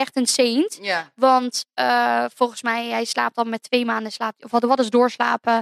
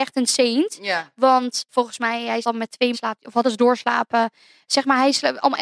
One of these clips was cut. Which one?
second; 4 cuts; at 1.7 s, 2.4 s, 2.9 s, 3.4 s

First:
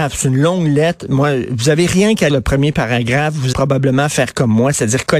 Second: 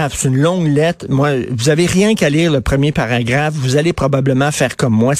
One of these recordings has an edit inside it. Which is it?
first; 2 cuts; at 2.3 s, 3.5 s

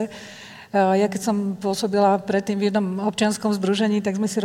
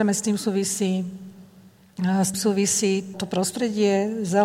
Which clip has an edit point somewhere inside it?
second; 2 cuts; at 2.3 s, 3.1 s

